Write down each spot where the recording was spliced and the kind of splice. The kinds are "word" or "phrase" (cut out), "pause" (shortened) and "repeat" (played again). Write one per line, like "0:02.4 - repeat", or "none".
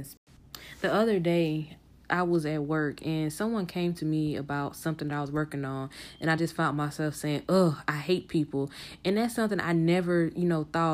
none